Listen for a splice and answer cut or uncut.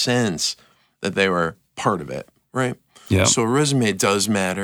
uncut